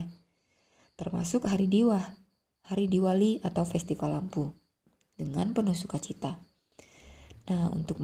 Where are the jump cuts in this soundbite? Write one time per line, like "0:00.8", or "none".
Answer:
none